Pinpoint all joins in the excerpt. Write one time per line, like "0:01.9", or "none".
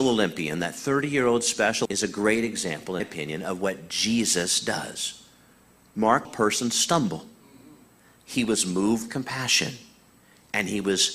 0:01.9
0:03.0
0:06.2
0:09.1